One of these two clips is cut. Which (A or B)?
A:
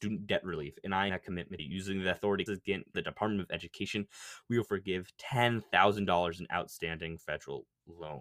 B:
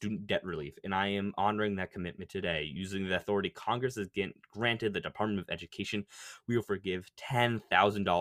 A